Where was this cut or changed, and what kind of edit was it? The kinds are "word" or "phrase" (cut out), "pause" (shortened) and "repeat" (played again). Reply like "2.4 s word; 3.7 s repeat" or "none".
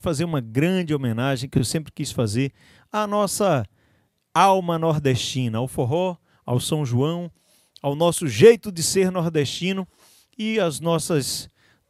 none